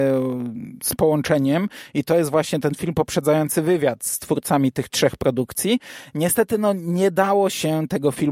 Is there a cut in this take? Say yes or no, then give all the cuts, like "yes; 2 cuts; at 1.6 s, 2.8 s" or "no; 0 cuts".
no; 0 cuts